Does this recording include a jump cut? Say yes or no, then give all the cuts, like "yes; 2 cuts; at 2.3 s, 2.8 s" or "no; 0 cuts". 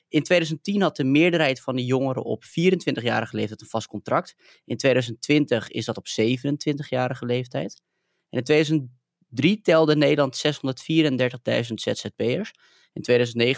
no; 0 cuts